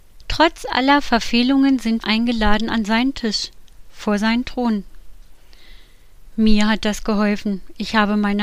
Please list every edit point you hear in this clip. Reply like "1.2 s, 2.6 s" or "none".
2.0 s